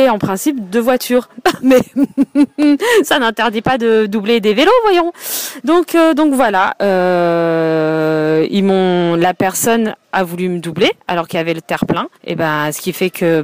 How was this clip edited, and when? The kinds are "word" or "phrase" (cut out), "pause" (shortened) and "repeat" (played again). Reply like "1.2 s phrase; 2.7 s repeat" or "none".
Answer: 10.0 s pause; 12.1 s pause

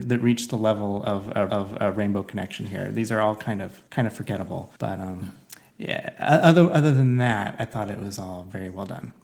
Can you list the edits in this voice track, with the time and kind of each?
1.5 s repeat; 3.9 s pause; 4.8 s pause

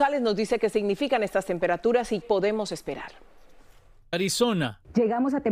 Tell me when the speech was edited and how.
2.2 s word; 4.1 s word

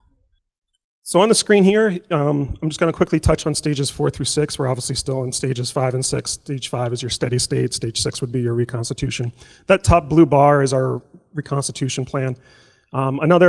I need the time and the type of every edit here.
none

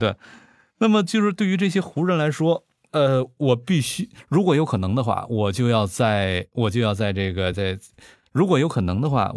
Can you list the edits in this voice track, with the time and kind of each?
none

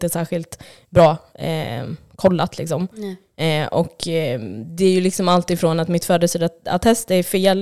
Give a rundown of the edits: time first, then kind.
none

